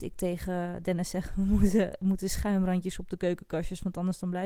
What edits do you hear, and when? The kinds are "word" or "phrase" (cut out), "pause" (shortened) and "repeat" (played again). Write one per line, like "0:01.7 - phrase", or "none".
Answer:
none